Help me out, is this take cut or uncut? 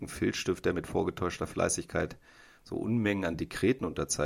uncut